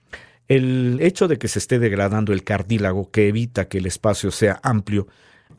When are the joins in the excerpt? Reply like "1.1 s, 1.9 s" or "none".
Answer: none